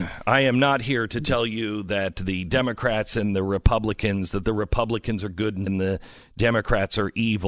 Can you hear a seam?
yes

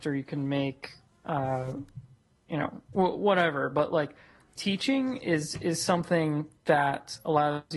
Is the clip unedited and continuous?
yes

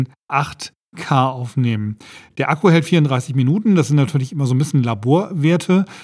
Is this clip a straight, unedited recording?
yes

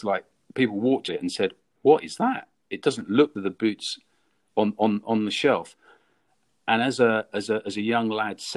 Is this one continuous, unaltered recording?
no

